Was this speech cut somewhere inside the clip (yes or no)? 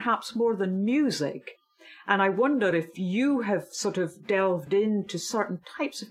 no